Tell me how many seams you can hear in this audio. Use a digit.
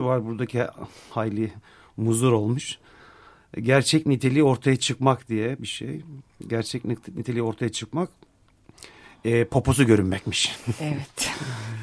0